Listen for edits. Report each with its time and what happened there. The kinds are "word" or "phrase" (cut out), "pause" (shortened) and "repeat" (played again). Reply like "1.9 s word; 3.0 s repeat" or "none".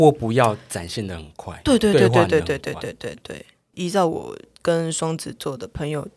none